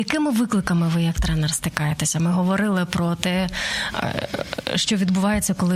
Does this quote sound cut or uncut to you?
uncut